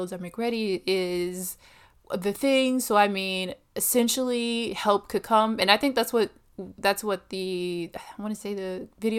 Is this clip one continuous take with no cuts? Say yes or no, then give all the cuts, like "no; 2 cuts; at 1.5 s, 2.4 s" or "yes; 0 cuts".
yes; 0 cuts